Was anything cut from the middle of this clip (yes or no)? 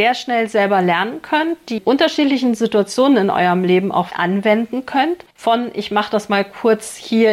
yes